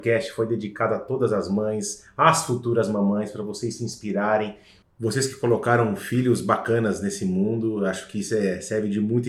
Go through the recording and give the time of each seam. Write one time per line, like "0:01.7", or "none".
none